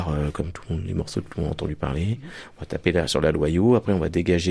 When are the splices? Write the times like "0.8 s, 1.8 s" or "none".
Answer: none